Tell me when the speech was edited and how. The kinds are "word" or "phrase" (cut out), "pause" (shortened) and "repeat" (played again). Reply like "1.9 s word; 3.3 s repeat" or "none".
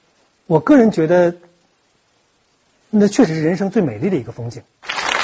none